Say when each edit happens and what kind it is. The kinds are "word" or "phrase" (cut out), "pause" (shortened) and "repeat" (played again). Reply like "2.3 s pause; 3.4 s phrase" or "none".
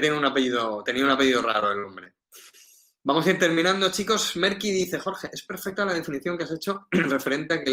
none